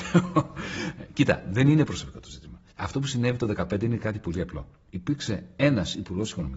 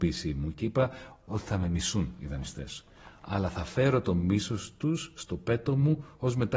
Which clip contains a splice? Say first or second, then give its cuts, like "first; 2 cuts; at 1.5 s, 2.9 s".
first; 1 cut; at 2.7 s